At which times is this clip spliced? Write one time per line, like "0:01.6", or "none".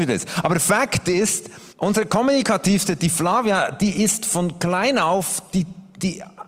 0:01.7